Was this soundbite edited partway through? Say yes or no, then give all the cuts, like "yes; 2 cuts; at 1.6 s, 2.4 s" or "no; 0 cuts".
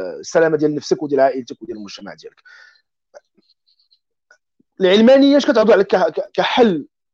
no; 0 cuts